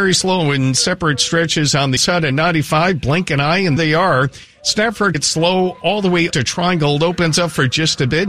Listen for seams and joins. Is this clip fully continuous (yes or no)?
no